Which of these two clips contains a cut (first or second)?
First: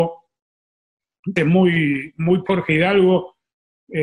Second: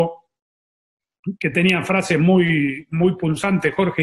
first